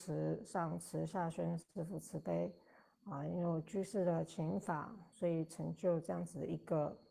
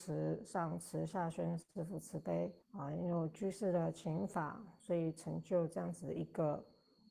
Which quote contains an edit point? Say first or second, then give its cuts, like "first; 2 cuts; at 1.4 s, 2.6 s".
second; 1 cut; at 2.6 s